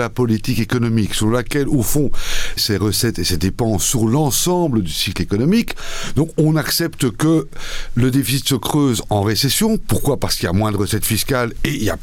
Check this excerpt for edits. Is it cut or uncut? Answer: cut